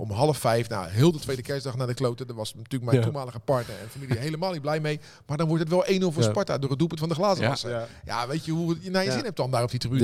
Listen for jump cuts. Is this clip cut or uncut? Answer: uncut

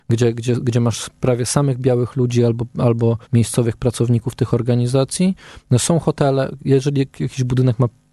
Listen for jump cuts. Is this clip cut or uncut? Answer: cut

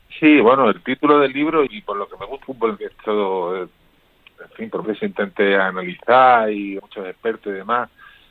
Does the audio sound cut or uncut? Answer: cut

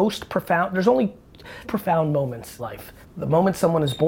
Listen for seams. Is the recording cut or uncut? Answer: cut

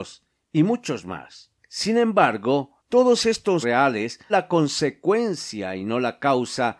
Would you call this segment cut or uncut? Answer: cut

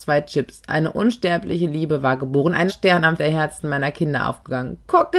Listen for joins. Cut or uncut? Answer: cut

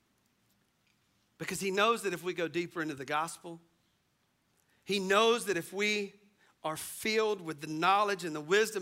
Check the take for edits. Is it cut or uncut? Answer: uncut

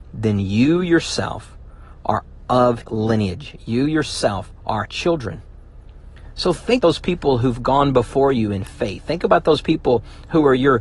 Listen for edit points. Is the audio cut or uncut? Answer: cut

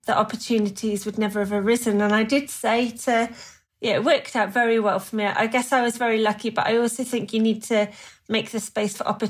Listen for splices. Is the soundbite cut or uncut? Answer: uncut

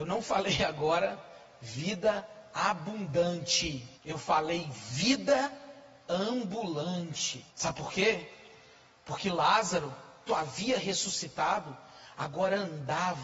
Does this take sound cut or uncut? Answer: cut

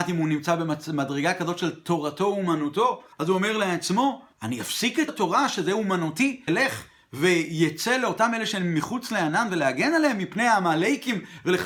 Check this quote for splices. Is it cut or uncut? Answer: cut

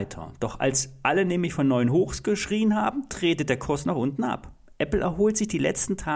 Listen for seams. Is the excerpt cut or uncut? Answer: uncut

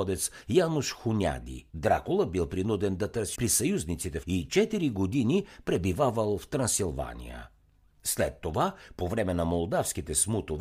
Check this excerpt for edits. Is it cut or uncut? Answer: cut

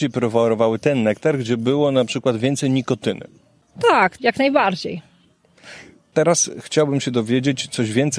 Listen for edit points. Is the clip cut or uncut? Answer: cut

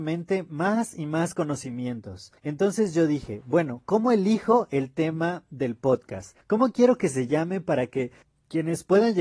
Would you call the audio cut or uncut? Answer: cut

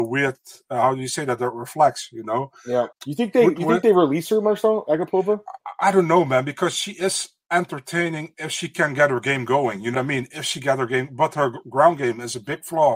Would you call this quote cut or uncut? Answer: cut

